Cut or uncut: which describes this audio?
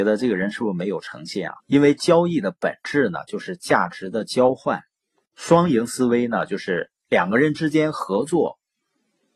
cut